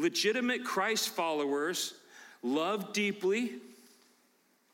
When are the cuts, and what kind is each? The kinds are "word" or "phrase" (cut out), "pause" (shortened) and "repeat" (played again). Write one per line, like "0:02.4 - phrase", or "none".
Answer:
none

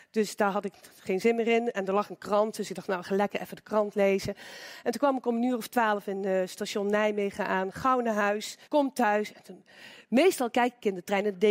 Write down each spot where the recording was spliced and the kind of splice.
0:08.6 - pause

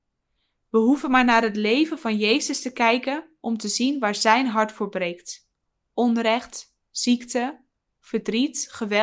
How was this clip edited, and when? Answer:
none

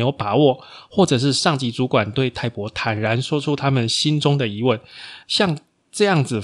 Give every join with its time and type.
0:05.2 - pause

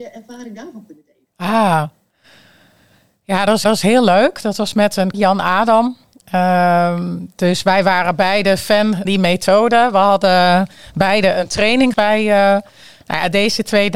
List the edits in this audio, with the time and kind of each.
0:01.3 - pause
0:03.6 - repeat
0:05.1 - word
0:09.0 - word
0:11.9 - word

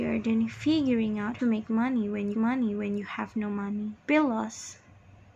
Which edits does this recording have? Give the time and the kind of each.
0:01.4 - phrase
0:02.3 - repeat
0:04.0 - pause

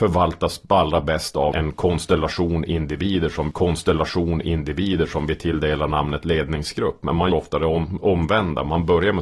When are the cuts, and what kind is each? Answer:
0:01.5 - word
0:03.5 - repeat
0:07.3 - word

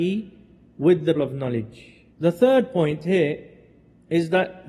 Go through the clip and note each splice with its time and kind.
0:01.2 - word
0:02.1 - pause

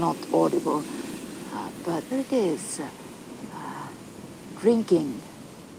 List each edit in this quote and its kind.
0:02.1 - word

